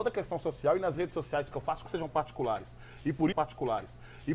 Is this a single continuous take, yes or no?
no